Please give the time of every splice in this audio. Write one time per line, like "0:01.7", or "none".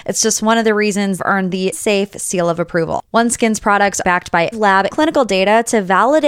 0:01.2
0:01.7
0:04.0
0:04.5
0:04.9